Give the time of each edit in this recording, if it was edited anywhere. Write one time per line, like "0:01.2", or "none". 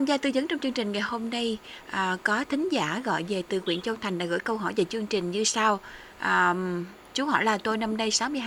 0:06.1

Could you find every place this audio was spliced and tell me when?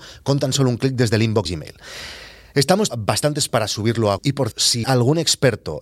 0:01.5
0:02.9
0:03.5
0:04.2
0:04.5
0:04.8

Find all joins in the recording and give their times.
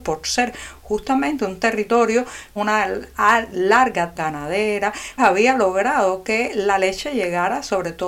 0:02.6
0:04.1
0:05.2

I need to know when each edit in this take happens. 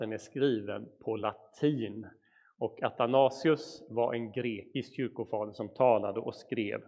none

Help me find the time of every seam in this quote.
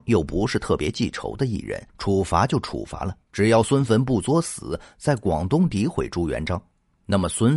0:01.9
0:03.2

